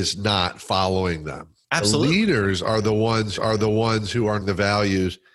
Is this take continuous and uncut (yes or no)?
no